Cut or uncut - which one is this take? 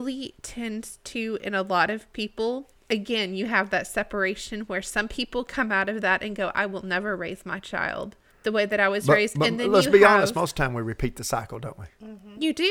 cut